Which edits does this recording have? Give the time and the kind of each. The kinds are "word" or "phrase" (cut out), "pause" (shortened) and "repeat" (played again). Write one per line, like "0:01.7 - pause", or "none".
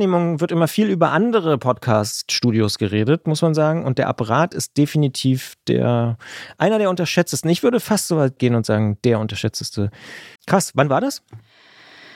0:10.4 - pause